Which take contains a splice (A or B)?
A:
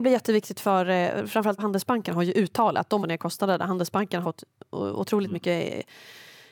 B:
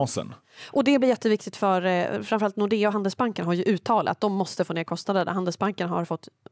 A